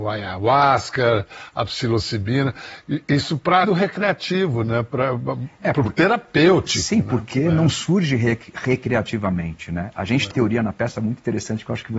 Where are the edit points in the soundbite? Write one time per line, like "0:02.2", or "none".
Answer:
0:03.6
0:10.3